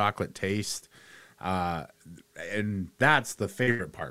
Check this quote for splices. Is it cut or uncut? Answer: uncut